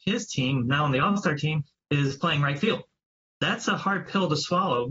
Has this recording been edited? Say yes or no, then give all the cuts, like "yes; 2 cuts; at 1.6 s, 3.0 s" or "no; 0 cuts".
no; 0 cuts